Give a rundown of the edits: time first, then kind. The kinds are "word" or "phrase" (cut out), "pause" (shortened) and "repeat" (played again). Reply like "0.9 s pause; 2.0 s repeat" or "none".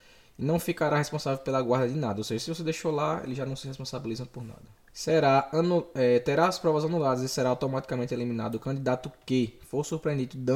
none